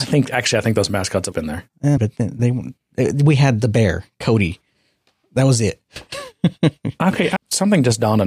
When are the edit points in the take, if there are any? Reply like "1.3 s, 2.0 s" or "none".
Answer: 1.3 s, 2.0 s, 7.4 s